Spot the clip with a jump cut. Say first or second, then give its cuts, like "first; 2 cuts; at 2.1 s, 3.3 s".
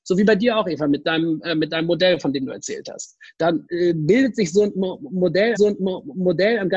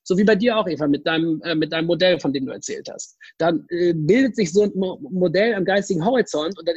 first; 1 cut; at 5.6 s